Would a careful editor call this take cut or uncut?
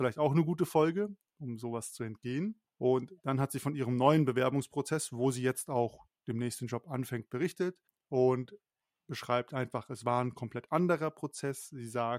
cut